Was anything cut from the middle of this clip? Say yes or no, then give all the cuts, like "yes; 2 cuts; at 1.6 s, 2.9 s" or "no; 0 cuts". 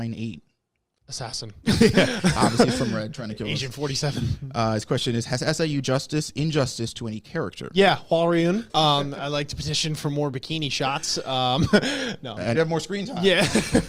yes; 3 cuts; at 5.8 s, 8.7 s, 12.5 s